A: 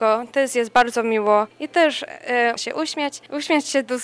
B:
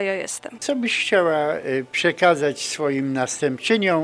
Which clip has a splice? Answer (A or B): A